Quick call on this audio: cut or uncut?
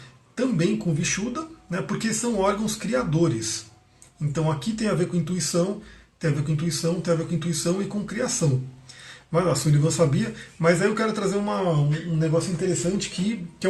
uncut